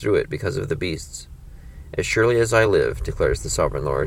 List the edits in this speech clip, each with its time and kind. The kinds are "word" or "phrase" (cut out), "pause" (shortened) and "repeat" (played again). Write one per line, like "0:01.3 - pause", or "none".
none